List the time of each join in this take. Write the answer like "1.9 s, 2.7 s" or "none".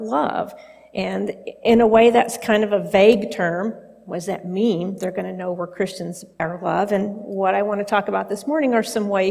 6.4 s